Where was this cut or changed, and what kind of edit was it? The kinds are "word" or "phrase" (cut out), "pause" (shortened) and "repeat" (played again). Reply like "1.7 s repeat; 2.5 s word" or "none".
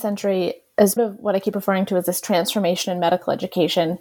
1.0 s word